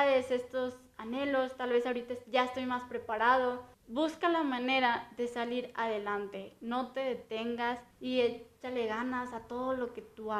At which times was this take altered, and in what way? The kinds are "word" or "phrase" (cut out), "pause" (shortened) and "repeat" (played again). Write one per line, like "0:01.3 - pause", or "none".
0:03.7 - pause
0:07.9 - pause

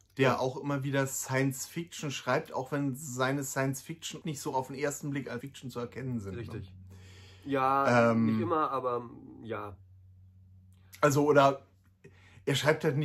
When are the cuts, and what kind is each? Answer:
0:04.2 - word
0:05.4 - word

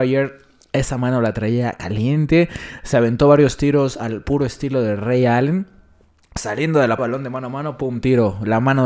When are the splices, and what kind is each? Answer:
0:07.0 - word

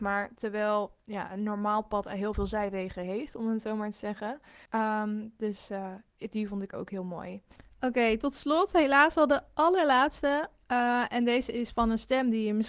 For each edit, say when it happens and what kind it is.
0:04.7 - pause

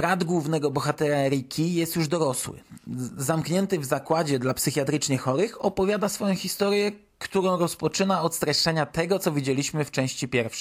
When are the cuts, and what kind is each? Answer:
none

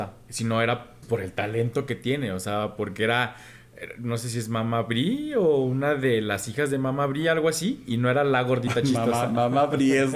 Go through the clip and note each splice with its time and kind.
0:01.0 - word

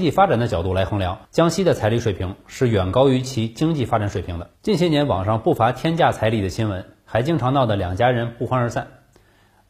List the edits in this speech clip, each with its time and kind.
0:01.2 - pause
0:04.6 - pause

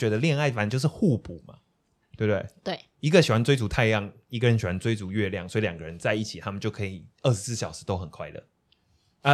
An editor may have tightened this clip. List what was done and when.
none

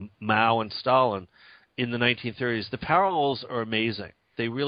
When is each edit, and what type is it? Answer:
none

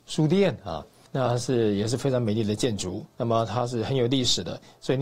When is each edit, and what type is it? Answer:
0:01.1 - pause
0:03.1 - pause

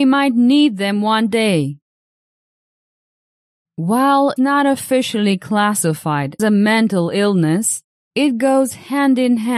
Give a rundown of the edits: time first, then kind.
0:04.4 - word
0:06.4 - word

